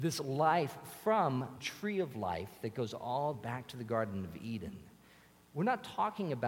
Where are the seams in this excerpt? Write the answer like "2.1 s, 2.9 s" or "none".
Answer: 1.6 s, 3.3 s